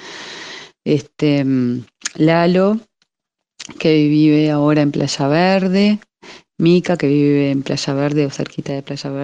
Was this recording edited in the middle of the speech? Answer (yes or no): no